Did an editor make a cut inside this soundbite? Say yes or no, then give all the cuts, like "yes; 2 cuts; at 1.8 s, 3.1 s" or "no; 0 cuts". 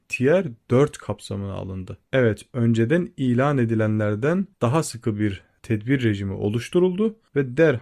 yes; 1 cut; at 4.5 s